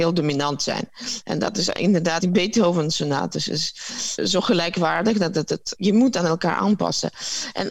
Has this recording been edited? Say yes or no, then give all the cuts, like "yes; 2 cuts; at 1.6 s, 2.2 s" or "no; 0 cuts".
yes; 3 cuts; at 2.2 s, 4.2 s, 5.8 s